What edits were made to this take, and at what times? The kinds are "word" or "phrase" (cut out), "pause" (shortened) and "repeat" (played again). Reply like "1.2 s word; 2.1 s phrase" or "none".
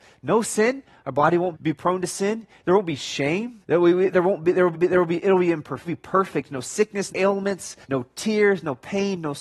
1.5 s word; 3.6 s pause; 4.7 s repeat; 5.9 s word; 7.1 s word; 7.8 s pause